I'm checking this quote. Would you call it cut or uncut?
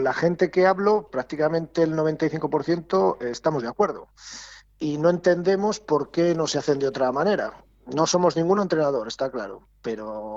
cut